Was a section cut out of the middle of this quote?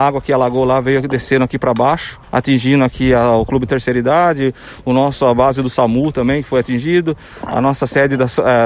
yes; 1 cut; at 2.2 s

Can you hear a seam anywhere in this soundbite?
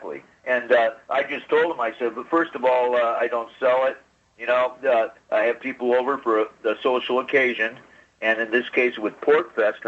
no; 0 cuts

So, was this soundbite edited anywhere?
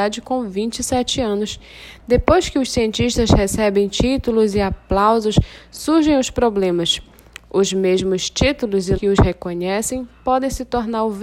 yes; 1 cut; at 9.0 s

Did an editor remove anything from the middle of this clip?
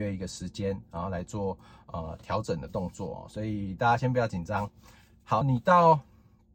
yes; 1 cut; at 5.4 s

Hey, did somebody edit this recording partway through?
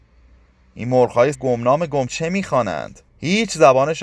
yes; 3 cuts; at 1.3 s, 2.1 s, 3.1 s

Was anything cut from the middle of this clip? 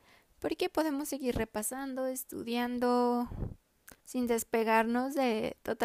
yes; 1 cut; at 4.0 s

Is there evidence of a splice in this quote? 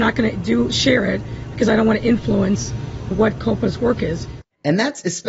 yes; 1 cut; at 3.1 s

